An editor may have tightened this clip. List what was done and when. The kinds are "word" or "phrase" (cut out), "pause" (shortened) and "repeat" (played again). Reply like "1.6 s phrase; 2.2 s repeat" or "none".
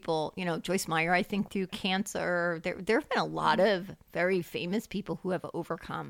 1.5 s word